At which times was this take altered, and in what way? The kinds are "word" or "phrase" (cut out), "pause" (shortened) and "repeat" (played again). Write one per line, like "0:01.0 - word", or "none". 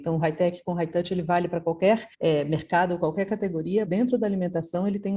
0:02.1 - pause
0:03.8 - word